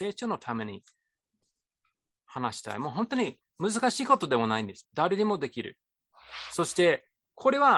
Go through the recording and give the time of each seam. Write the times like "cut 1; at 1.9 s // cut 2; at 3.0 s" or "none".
cut 1; at 4.8 s